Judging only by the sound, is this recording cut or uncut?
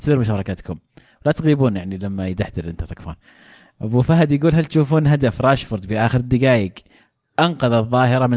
uncut